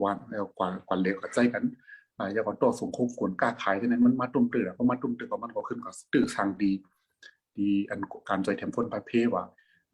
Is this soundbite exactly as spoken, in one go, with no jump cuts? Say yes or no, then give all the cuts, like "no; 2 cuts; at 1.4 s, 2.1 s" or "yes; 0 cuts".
yes; 0 cuts